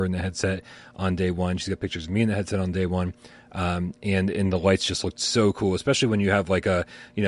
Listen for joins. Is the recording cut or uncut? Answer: uncut